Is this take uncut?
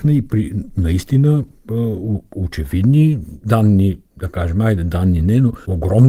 yes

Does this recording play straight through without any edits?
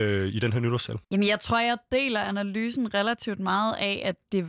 no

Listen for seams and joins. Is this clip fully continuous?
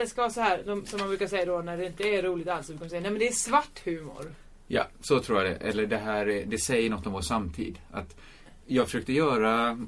yes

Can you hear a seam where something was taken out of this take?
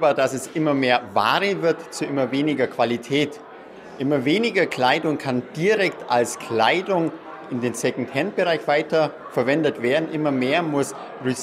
no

